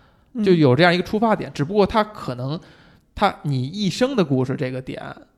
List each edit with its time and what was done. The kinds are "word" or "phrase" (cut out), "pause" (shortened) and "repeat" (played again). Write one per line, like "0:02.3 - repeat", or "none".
none